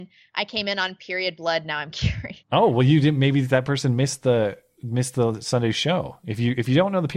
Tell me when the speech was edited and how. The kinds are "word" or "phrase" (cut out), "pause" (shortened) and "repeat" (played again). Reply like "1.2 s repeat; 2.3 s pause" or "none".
2.4 s pause